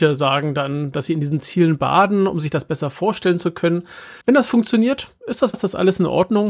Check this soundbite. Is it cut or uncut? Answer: cut